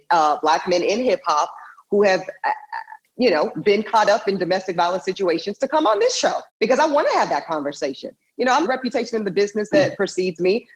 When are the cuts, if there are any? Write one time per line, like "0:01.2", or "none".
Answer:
0:03.0
0:06.5
0:08.6